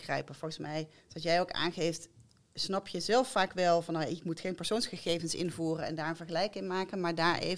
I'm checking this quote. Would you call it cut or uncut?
uncut